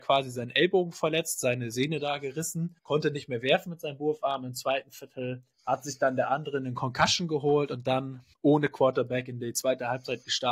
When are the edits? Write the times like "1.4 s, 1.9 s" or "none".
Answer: 2.8 s, 5.5 s, 8.3 s